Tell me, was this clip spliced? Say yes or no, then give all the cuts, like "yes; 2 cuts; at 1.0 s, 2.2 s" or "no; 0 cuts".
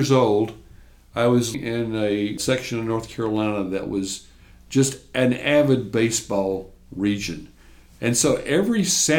yes; 1 cut; at 1.5 s